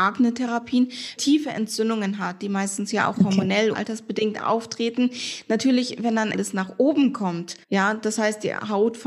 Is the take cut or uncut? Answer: cut